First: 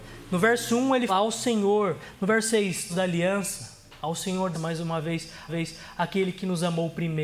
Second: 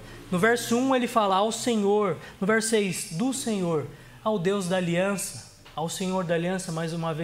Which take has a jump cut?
first; 4 cuts; at 1.1 s, 2.9 s, 4.5 s, 5.5 s

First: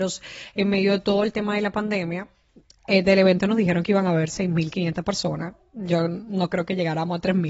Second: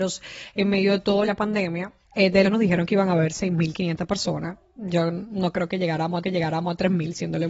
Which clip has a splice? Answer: second; 4 cuts; at 1.3 s, 2.0 s, 2.4 s, 6.2 s

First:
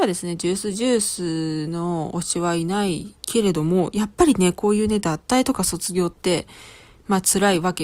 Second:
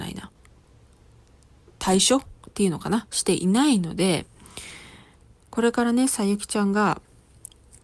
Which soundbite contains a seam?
first; 1 cut; at 3.2 s

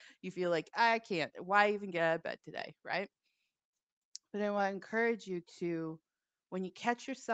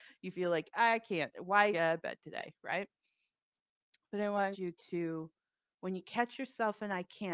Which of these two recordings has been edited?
second; 2 cuts; at 1.7 s, 4.5 s

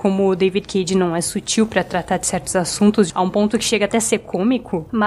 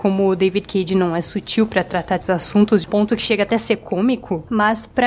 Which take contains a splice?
second; 2 cuts; at 2.2 s, 2.9 s

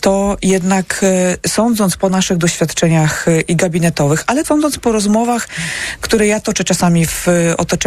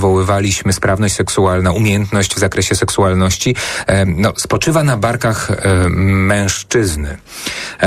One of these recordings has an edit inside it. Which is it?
first; 1 cut; at 4.4 s

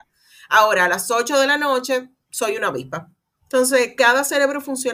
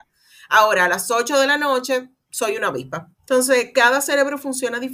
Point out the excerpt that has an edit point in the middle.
second; 1 cut; at 3.1 s

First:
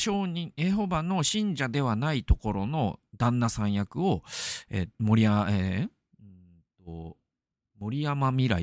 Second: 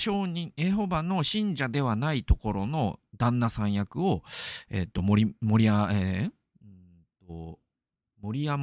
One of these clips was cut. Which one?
first; 1 cut; at 4.9 s

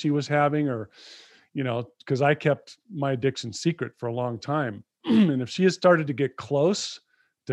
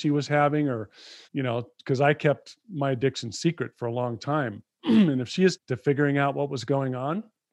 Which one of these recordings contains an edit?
second; 2 cuts; at 1.2 s, 5.5 s

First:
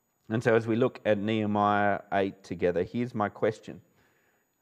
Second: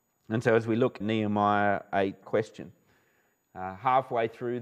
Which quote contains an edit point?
second; 2 cuts; at 1.0 s, 2.2 s

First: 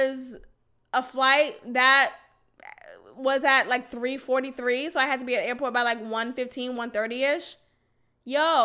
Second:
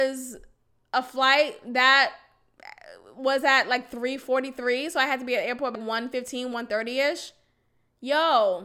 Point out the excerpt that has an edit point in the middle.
second; 1 cut; at 5.7 s

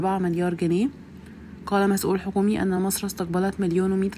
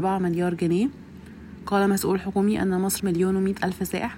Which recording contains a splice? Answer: second; 1 cut; at 3.0 s

